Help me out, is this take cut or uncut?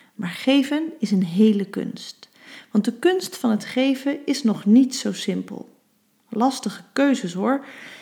uncut